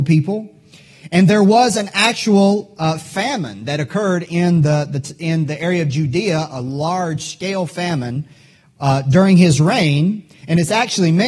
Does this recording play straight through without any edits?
yes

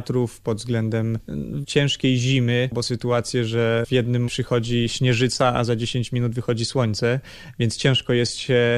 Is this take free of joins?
no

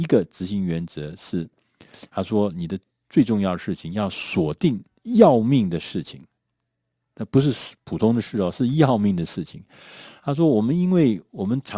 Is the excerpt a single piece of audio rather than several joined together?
no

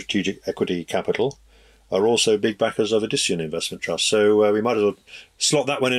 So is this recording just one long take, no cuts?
yes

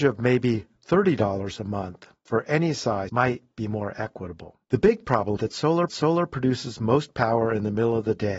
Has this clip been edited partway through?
yes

